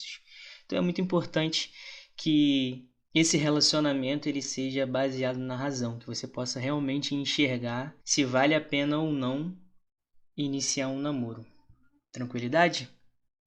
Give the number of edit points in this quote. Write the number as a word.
two